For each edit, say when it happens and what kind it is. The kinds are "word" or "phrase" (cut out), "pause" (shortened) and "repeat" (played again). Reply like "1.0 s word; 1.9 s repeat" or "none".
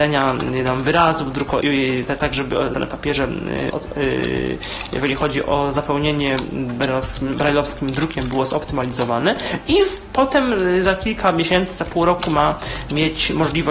1.6 s word; 2.7 s word; 3.7 s word